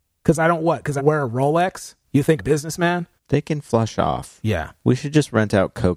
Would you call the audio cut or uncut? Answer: cut